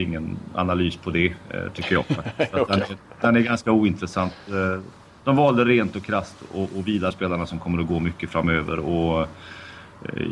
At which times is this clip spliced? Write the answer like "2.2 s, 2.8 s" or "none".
7.1 s